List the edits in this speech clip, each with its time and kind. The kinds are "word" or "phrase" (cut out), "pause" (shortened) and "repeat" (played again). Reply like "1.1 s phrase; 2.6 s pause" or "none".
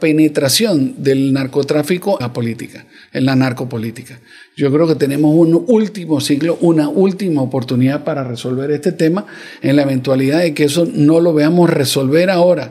2.2 s word